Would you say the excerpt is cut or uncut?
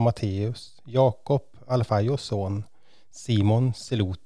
uncut